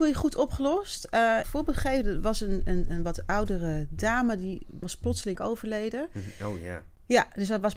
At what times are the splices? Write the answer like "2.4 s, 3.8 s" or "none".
1.4 s, 4.8 s, 5.4 s